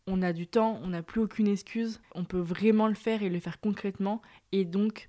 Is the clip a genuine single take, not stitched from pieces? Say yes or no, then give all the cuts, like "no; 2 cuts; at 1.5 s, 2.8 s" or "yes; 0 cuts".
no; 1 cut; at 2.0 s